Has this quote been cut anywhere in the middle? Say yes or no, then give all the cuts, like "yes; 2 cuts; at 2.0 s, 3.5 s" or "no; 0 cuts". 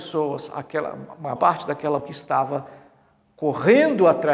yes; 2 cuts; at 1.4 s, 2.0 s